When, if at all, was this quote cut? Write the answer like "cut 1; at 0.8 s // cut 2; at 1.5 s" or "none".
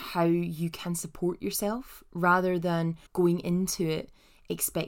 cut 1; at 3.1 s